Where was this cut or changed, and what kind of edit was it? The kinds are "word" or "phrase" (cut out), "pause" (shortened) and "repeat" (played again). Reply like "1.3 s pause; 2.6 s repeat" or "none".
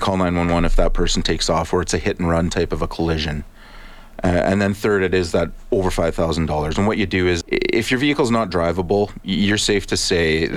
7.4 s word